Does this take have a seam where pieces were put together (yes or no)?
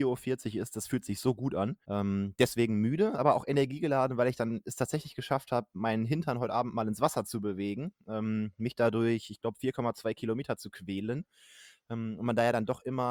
yes